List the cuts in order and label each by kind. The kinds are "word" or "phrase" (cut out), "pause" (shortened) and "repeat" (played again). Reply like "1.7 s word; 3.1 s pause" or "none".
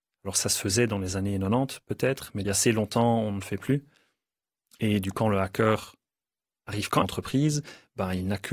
2.4 s word; 5.1 s word; 7.0 s phrase